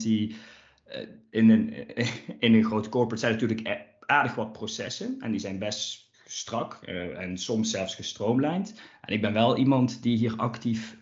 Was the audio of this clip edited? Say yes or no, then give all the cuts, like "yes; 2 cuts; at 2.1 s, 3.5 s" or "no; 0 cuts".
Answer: yes; 1 cut; at 6.1 s